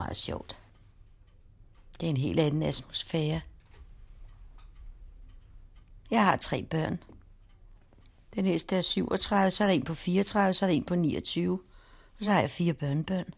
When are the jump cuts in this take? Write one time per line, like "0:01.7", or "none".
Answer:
none